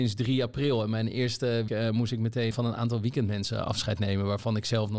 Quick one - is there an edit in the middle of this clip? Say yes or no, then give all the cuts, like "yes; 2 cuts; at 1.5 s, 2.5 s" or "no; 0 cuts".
yes; 2 cuts; at 1.7 s, 2.5 s